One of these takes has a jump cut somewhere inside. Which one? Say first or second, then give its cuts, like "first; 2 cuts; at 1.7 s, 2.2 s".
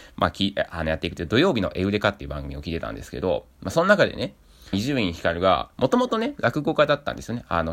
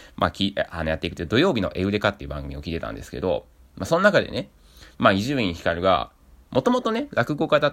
first; 3 cuts; at 3.5 s, 4.7 s, 5.7 s